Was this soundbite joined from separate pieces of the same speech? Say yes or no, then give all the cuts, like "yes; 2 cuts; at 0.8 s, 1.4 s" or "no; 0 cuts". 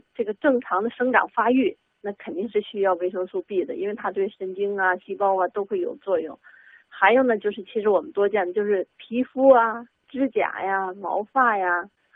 no; 0 cuts